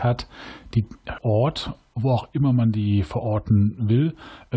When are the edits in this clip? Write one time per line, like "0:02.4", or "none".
0:01.2